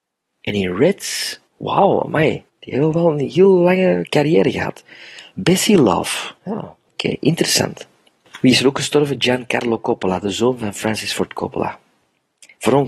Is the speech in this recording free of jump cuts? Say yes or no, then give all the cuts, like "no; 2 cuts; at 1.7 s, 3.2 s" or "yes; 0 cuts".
no; 4 cuts; at 1.5 s, 2.5 s, 6.4 s, 6.8 s